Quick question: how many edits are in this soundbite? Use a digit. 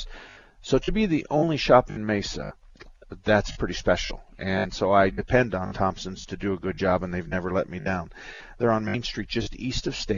0